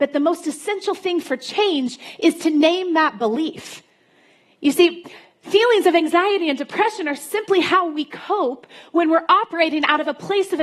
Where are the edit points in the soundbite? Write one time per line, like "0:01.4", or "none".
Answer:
none